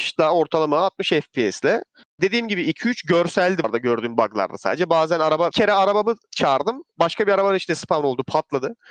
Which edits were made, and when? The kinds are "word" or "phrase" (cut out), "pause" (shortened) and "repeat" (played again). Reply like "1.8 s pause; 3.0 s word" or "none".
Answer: 2.2 s word; 3.6 s word; 5.5 s word